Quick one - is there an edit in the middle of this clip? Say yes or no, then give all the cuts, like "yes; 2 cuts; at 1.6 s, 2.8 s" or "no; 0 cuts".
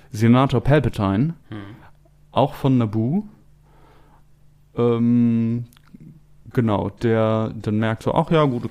no; 0 cuts